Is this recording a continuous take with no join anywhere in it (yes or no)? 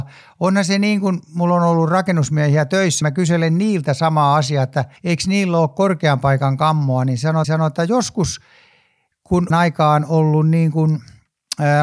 no